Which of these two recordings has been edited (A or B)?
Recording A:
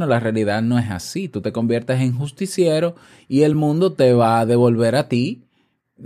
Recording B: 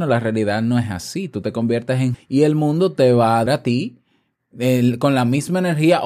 B